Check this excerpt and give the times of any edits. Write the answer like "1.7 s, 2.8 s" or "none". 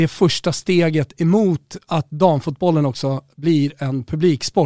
none